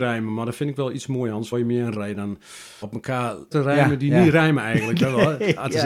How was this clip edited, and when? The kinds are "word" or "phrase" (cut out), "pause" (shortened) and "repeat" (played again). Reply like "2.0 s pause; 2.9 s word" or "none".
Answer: 1.5 s word; 1.9 s word; 2.8 s word; 3.5 s word